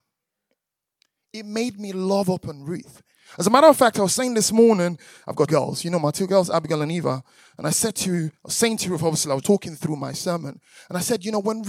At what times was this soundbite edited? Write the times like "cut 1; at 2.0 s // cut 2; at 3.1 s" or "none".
cut 1; at 5.5 s // cut 2; at 9.4 s